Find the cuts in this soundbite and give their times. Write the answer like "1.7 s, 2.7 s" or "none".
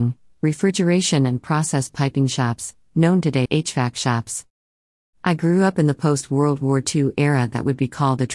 3.5 s